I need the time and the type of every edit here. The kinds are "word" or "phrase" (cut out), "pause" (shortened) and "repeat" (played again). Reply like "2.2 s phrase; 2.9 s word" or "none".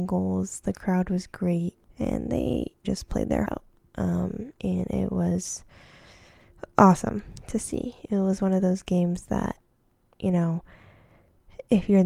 1.8 s pause; 2.8 s word; 3.5 s word; 4.6 s pause